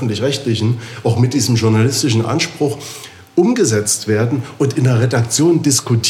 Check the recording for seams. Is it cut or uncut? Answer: uncut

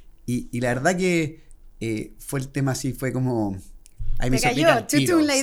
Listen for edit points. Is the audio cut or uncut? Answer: uncut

